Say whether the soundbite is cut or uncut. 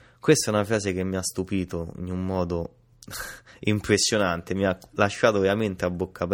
uncut